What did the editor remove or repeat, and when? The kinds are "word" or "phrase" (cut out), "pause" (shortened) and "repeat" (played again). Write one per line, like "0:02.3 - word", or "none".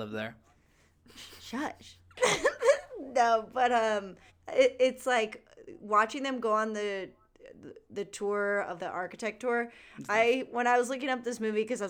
0:04.3 - pause
0:08.8 - word

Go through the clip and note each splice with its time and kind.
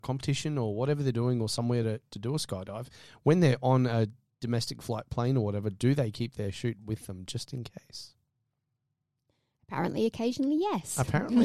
none

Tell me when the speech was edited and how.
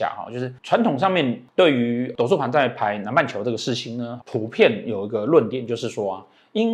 0:04.2 - word

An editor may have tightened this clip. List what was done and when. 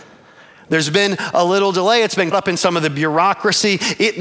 0:02.3 - word

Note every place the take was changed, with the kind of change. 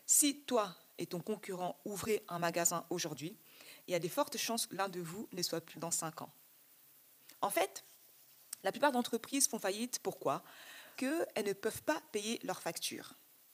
0:04.7 - word
0:05.7 - word
0:10.9 - word

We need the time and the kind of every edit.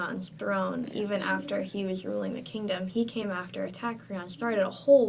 none

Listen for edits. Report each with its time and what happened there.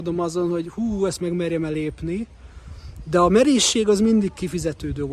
none

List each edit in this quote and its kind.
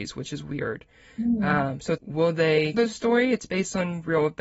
0:02.0 - word
0:02.7 - word

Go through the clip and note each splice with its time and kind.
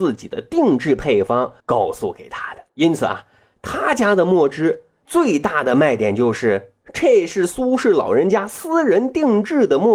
0:01.6 - pause
0:02.7 - pause
0:06.8 - pause

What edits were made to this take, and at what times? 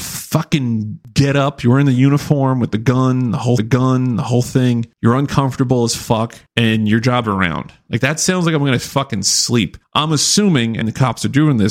0:03.6 - repeat
0:07.2 - phrase
0:10.8 - phrase

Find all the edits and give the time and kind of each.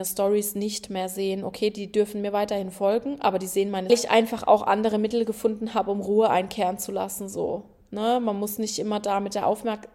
0:03.9 - phrase

